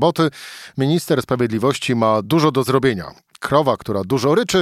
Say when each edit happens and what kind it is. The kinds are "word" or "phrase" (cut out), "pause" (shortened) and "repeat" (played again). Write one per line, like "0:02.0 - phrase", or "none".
none

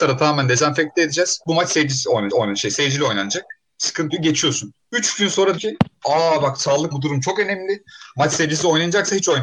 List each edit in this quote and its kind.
0:02.3 - repeat
0:04.1 - word
0:04.8 - pause
0:05.6 - word
0:06.9 - word

